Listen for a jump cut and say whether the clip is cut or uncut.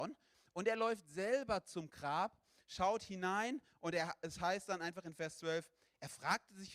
uncut